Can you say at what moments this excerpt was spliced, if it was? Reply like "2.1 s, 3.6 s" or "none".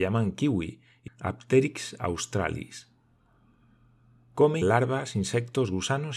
1.1 s, 4.6 s